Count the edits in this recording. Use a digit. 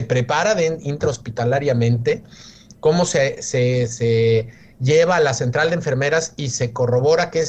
0